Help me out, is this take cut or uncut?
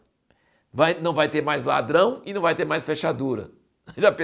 uncut